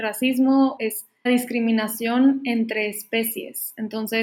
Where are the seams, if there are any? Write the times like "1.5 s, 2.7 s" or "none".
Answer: 1.3 s